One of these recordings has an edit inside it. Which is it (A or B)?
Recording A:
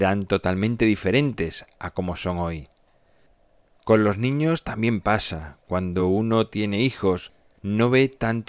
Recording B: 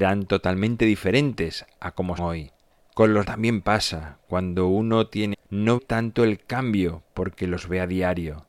B